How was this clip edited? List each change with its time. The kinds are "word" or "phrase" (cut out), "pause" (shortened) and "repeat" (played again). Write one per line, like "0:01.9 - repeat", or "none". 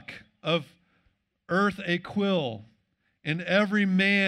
none